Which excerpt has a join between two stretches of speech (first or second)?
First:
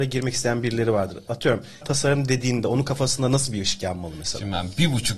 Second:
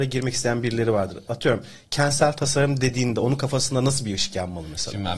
first